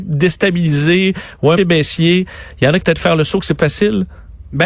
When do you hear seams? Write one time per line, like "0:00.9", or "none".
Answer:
0:01.6
0:02.8
0:03.6